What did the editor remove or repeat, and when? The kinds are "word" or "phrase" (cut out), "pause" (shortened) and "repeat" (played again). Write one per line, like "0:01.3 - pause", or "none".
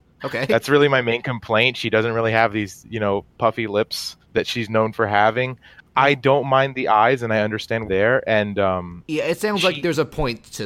0:04.2 - pause
0:07.8 - phrase